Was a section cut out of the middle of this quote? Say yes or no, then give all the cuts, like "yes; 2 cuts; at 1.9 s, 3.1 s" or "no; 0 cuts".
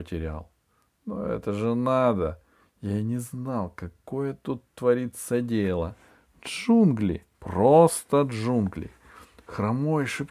no; 0 cuts